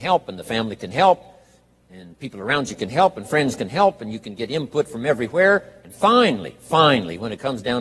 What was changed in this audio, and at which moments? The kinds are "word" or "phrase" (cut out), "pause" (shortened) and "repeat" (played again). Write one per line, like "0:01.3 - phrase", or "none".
none